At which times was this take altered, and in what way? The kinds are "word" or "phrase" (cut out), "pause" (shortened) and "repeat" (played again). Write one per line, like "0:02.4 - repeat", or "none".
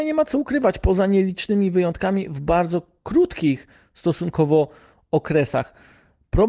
none